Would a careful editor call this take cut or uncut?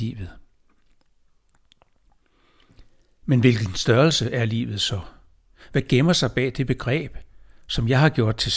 uncut